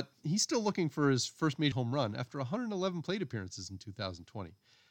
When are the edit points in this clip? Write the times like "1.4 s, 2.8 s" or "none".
1.7 s